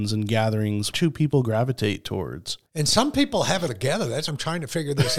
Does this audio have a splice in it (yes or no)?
yes